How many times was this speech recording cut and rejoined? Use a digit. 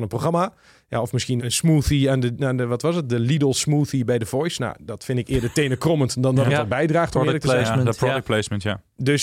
1